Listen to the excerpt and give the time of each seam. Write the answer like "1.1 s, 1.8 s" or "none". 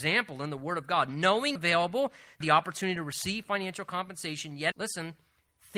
1.6 s, 2.4 s, 4.7 s